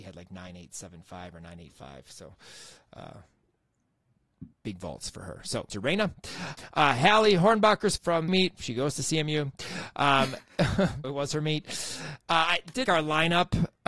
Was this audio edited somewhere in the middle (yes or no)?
yes